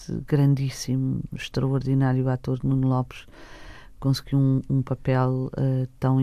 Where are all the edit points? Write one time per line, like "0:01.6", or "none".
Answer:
none

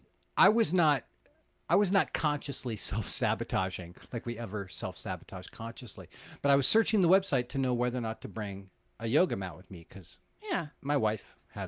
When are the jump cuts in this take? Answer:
none

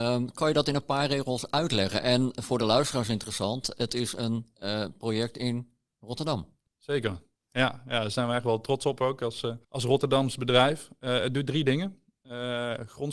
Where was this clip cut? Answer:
0:06.7
0:09.6

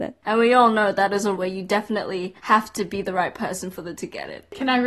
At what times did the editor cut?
0:01.4
0:02.4
0:03.9

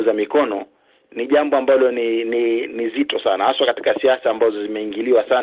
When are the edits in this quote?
none

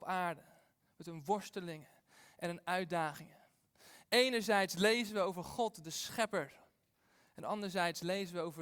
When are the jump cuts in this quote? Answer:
none

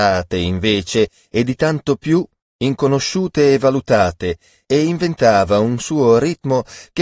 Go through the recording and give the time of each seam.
0:02.8

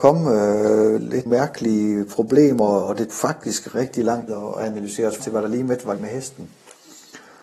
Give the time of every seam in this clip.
0:01.3
0:03.1
0:03.7
0:04.3
0:05.2
0:06.0

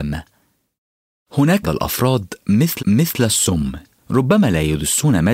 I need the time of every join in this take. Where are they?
0:01.6
0:02.8

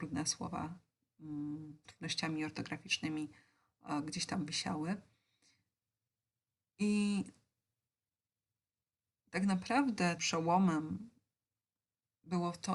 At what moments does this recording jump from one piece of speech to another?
0:01.8
0:10.2

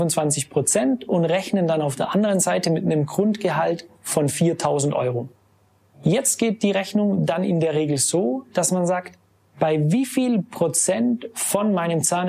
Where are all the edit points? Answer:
none

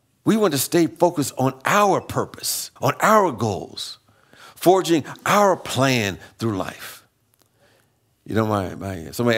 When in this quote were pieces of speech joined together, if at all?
0:02.8

